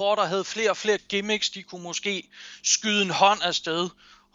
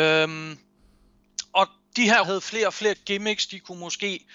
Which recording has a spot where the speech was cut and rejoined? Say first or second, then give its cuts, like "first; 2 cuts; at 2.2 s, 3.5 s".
second; 1 cut; at 2.2 s